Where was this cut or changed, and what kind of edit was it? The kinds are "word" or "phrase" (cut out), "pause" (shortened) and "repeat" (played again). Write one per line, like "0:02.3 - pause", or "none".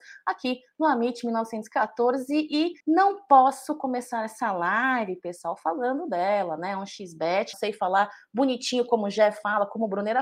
0:02.8 - pause
0:07.5 - word